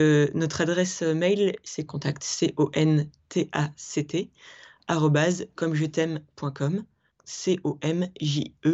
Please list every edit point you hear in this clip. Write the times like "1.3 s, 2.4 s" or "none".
1.9 s, 7.1 s